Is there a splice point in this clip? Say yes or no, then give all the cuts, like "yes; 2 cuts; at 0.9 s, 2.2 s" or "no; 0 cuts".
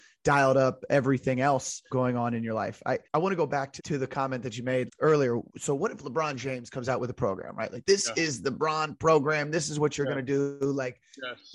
yes; 5 cuts; at 1.9 s, 3.0 s, 3.8 s, 4.9 s, 5.5 s